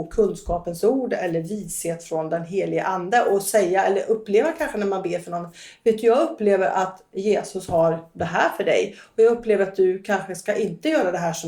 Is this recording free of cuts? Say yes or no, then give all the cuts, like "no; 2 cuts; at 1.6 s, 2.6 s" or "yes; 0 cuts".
yes; 0 cuts